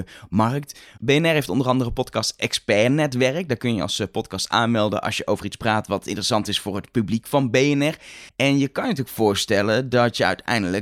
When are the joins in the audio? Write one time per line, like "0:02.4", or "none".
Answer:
0:08.3